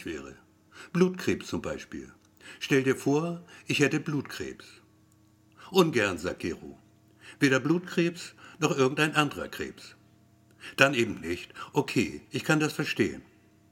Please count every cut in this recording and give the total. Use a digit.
1